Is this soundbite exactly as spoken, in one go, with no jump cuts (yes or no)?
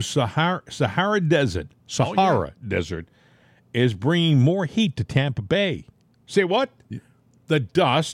yes